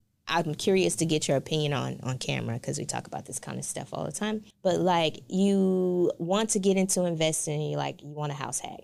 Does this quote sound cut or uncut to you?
cut